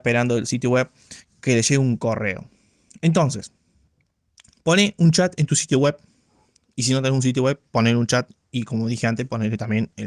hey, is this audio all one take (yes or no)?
yes